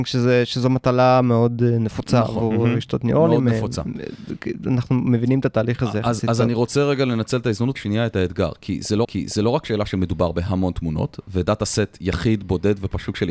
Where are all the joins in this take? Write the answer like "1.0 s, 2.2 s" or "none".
7.7 s, 9.0 s